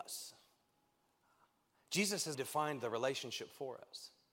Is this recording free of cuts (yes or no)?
no